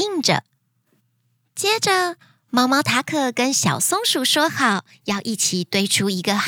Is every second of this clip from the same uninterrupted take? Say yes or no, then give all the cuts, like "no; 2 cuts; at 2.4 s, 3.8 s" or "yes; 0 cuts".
yes; 0 cuts